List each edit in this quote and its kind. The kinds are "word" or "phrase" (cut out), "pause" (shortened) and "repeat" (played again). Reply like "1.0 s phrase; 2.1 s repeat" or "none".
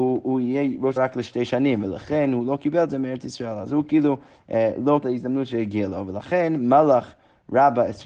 1.0 s word; 5.0 s phrase